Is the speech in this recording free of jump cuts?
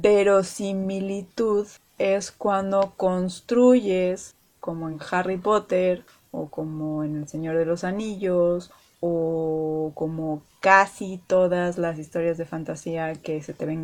yes; 0 cuts

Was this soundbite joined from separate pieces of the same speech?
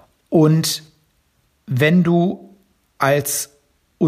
no; 0 cuts

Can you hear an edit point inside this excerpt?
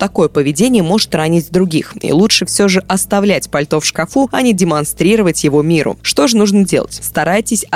no; 0 cuts

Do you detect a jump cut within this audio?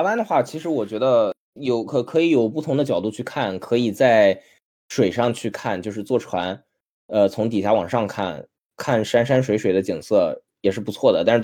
no; 0 cuts

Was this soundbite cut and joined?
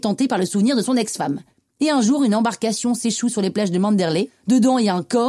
no; 0 cuts

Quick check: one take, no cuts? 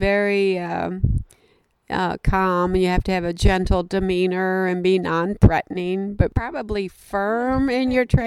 yes; 0 cuts

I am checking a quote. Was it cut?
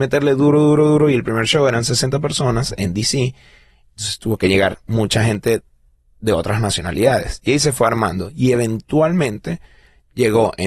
no; 0 cuts

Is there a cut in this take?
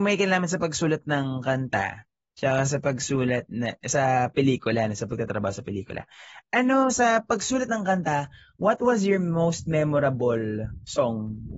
no; 0 cuts

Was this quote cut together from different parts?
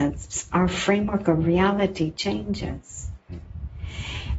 no; 0 cuts

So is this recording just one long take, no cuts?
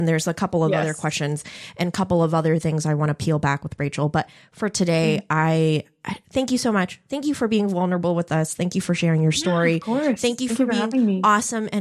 no; 1 cut; at 6.2 s

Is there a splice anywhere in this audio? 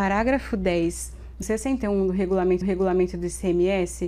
yes; 2 cuts; at 1.4 s, 2.6 s

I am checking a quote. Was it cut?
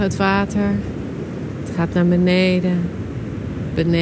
no; 0 cuts

